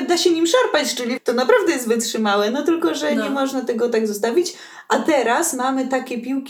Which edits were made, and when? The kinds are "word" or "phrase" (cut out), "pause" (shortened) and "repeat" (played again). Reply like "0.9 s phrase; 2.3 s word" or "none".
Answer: 1.2 s word